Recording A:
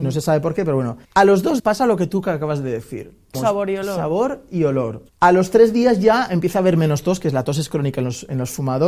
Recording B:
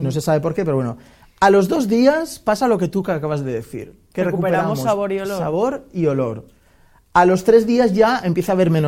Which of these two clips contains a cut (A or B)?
A